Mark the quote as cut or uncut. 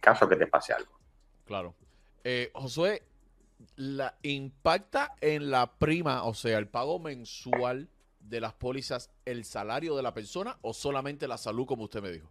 uncut